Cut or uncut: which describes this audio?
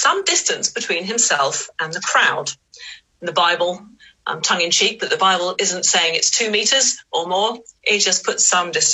uncut